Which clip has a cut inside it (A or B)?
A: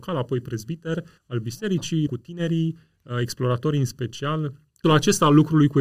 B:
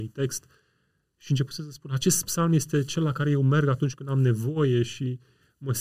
A